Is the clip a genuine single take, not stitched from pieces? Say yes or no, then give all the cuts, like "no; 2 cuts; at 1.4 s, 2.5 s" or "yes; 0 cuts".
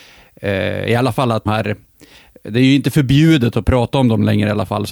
no; 1 cut; at 1.5 s